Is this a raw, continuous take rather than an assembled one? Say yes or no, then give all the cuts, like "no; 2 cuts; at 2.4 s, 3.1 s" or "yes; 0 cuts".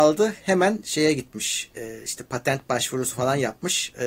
yes; 0 cuts